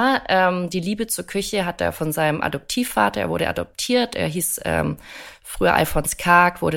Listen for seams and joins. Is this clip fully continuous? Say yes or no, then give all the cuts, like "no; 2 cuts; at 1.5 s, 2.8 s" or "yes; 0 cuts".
yes; 0 cuts